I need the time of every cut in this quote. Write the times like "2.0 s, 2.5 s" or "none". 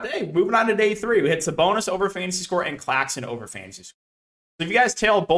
none